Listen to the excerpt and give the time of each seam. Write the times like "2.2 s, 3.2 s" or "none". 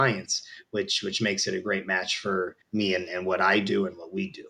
2.6 s